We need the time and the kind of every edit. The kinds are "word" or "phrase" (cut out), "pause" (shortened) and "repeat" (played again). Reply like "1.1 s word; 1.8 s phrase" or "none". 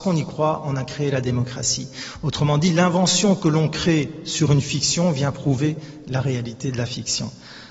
none